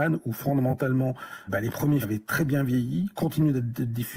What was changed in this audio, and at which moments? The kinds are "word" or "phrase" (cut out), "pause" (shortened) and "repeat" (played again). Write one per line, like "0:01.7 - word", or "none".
0:01.5 - word
0:02.0 - word